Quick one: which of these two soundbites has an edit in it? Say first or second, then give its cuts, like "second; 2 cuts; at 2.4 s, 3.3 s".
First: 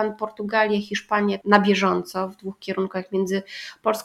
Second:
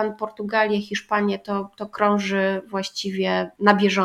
first; 1 cut; at 1.4 s